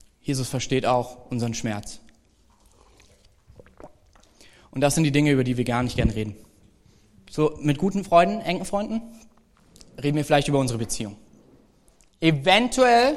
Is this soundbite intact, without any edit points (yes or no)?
yes